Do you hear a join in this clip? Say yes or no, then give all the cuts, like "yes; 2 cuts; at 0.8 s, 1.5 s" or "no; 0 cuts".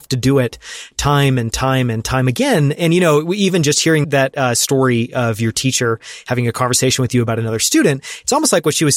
yes; 1 cut; at 4.0 s